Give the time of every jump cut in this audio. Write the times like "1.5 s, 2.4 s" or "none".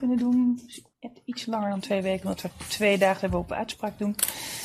0.9 s